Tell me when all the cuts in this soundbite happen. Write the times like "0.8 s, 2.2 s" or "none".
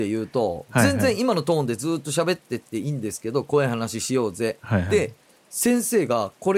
none